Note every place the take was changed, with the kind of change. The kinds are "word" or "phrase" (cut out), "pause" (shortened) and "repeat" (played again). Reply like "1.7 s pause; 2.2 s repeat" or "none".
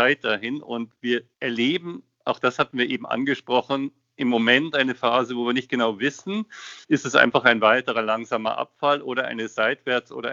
1.3 s pause; 6.8 s pause